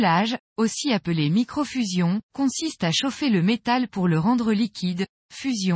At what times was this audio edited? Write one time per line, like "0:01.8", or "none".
0:02.2